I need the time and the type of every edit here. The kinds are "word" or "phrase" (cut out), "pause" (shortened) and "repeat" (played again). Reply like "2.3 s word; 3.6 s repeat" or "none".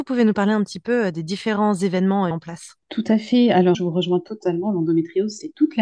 2.3 s word; 3.7 s word